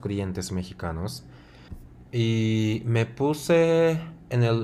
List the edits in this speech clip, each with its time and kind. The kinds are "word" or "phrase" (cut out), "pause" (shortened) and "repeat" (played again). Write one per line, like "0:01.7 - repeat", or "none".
0:02.1 - pause